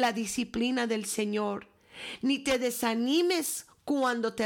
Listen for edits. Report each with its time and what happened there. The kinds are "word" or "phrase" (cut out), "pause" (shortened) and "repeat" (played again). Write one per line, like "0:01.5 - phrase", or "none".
none

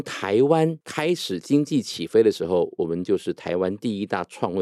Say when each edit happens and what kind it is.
none

